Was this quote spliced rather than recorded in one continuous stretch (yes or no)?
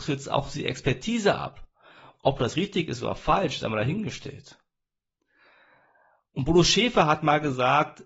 no